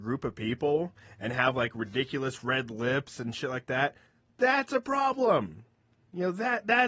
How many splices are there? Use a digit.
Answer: 0